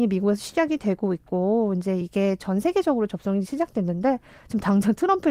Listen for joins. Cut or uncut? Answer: uncut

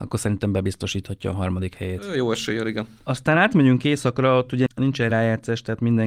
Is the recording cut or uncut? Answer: uncut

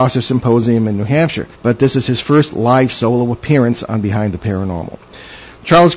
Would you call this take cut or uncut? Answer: cut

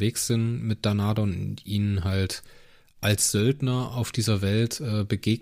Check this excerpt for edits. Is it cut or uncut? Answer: uncut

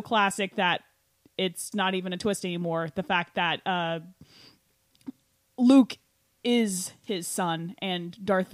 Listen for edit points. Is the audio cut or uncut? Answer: cut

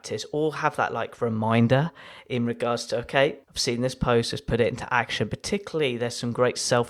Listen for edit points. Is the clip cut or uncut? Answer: cut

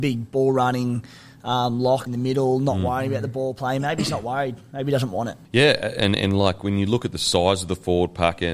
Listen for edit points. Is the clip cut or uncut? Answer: cut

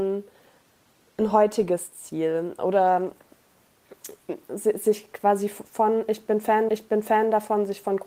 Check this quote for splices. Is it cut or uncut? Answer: cut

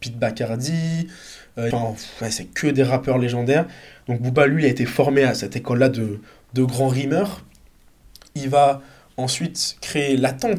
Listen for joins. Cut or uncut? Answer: cut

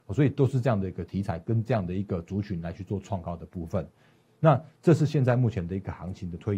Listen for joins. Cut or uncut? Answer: uncut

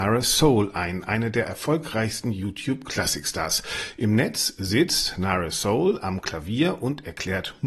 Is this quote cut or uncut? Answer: uncut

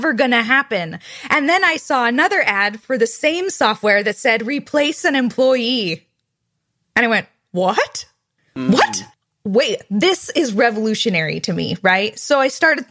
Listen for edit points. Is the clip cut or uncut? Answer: uncut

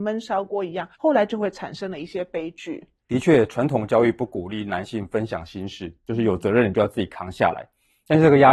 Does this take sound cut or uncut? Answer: cut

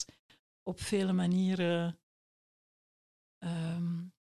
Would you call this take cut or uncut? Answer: uncut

